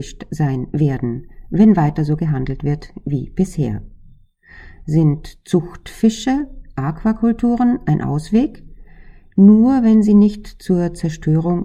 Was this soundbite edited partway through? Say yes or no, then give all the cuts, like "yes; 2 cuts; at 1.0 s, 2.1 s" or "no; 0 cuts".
no; 0 cuts